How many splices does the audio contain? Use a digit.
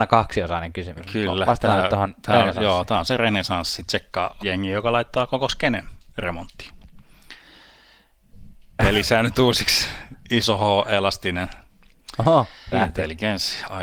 2